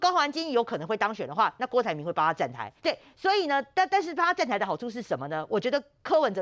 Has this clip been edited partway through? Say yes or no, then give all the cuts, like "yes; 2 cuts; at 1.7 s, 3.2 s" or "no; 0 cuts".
yes; 1 cut; at 2.8 s